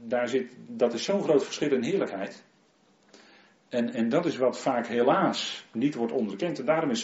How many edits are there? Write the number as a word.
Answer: zero